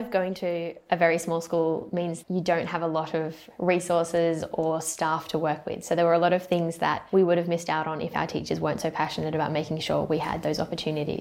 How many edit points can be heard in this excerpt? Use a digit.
1